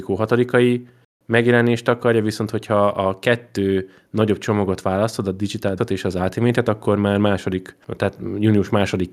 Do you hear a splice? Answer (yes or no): yes